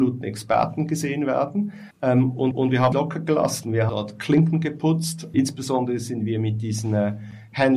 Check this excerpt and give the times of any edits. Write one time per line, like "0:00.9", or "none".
0:01.9
0:02.5
0:02.9
0:03.9
0:05.3